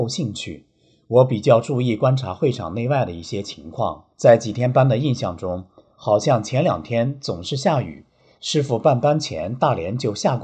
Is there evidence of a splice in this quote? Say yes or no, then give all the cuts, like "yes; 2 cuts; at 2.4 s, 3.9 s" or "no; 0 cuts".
yes; 1 cut; at 4.1 s